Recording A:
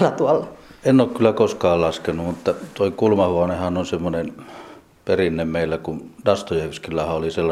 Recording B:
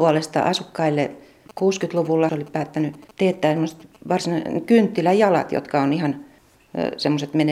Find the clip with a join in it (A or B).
B